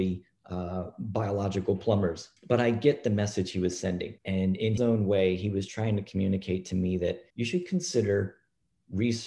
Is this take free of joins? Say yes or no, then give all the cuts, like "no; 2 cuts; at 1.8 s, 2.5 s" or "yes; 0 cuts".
no; 4 cuts; at 2.4 s, 4.2 s, 4.8 s, 7.3 s